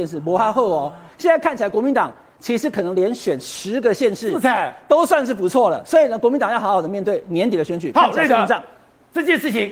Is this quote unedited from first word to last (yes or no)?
yes